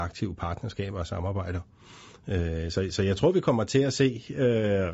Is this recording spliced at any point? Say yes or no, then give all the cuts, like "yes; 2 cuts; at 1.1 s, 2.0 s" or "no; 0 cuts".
no; 0 cuts